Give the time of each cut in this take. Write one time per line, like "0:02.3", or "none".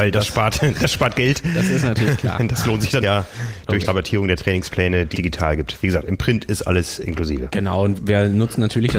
0:03.0
0:03.8
0:05.1
0:08.0